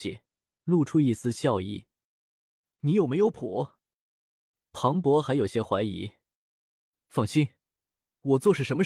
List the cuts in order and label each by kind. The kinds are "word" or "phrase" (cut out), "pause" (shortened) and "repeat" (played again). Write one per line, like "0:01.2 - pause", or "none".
none